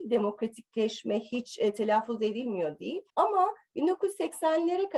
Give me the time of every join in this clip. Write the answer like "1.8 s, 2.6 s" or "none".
3.1 s